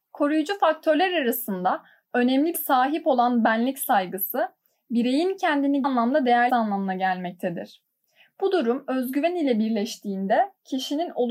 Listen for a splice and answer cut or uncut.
cut